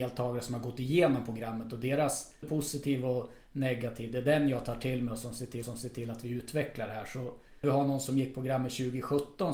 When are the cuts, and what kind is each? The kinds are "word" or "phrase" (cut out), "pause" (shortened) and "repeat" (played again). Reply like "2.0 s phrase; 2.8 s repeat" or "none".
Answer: 2.4 s phrase; 5.6 s repeat; 7.6 s word